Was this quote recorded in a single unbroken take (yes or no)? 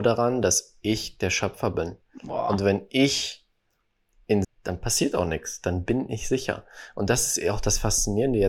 no